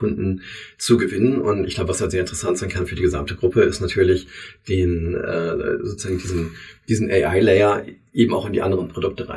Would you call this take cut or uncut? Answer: uncut